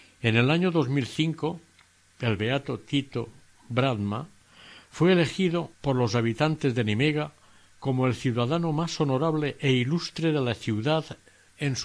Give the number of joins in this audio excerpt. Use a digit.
1